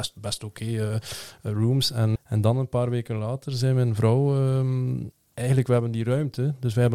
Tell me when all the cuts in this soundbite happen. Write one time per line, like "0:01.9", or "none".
0:02.2
0:05.1

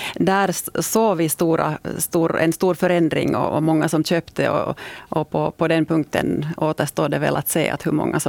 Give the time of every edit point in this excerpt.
none

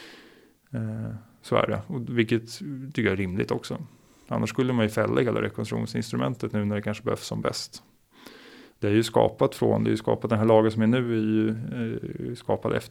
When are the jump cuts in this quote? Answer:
none

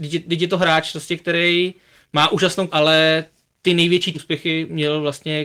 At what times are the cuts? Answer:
0:02.7
0:04.1

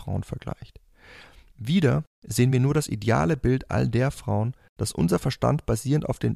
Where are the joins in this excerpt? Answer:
none

